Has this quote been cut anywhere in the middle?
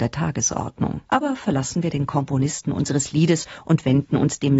yes; 1 cut; at 1.1 s

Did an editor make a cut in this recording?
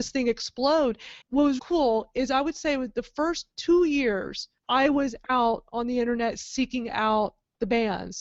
yes; 3 cuts; at 1.2 s, 1.6 s, 4.6 s

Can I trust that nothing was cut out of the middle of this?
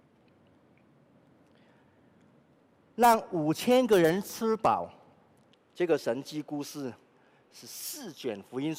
yes; 0 cuts

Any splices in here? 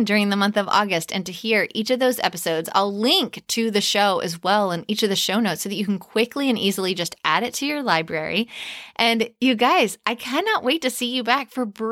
no; 0 cuts

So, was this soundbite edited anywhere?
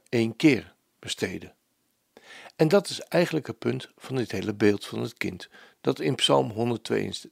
no; 0 cuts

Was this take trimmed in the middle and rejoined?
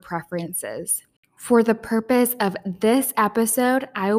no; 0 cuts

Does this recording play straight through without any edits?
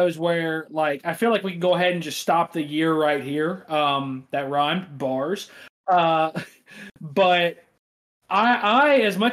yes; 0 cuts

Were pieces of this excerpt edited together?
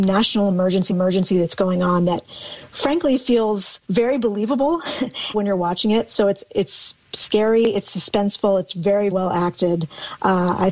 yes; 4 cuts; at 0.9 s, 3.8 s, 5.3 s, 9.1 s

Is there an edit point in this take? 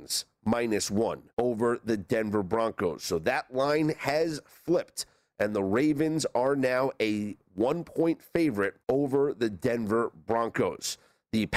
yes; 2 cuts; at 1.3 s, 8.8 s

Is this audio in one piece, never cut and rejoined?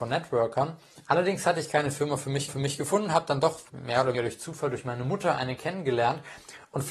no; 2 cuts; at 2.5 s, 4.1 s

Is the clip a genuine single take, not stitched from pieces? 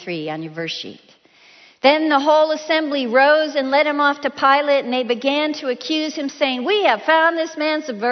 yes; 0 cuts

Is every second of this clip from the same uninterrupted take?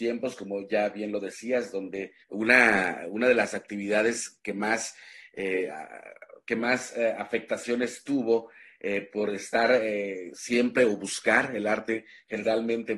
no; 1 cut; at 2.2 s

